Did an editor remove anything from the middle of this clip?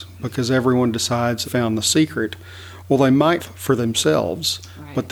yes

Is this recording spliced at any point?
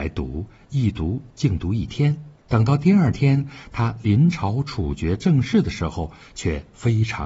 yes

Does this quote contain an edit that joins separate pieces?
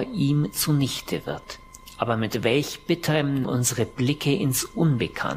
yes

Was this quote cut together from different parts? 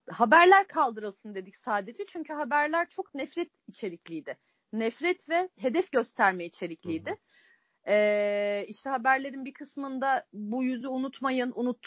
no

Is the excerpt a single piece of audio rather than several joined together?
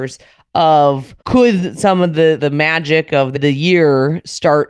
no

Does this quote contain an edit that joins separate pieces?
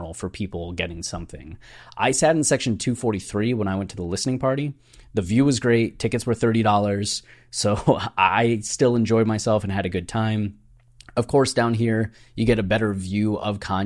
no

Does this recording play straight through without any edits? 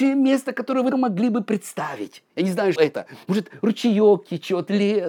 no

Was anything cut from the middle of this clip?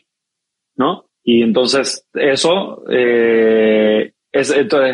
yes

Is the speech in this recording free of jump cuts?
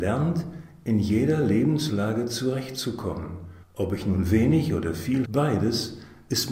no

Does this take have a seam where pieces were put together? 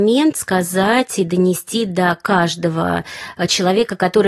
no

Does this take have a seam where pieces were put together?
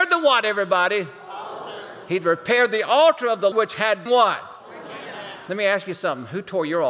yes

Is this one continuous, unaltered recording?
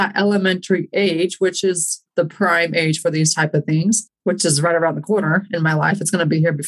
no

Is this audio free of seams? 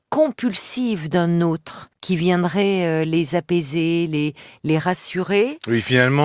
no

